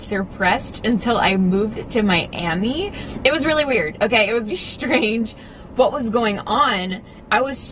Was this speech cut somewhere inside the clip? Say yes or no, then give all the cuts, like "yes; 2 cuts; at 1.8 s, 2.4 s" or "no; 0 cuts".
yes; 1 cut; at 4.5 s